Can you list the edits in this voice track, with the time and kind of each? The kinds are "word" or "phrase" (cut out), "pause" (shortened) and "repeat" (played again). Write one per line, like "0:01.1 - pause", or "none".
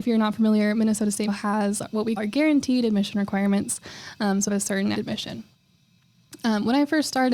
0:01.3 - word
0:02.2 - word
0:04.5 - phrase
0:04.9 - phrase